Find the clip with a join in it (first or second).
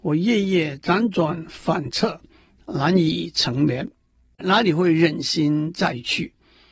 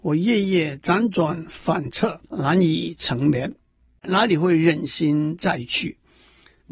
second